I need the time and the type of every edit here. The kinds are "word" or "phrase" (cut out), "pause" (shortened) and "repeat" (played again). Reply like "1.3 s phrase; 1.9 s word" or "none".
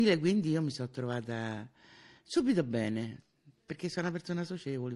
none